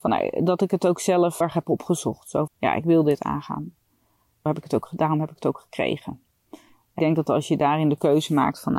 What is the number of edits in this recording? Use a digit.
4